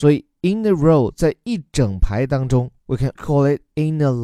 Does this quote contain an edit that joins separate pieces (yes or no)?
yes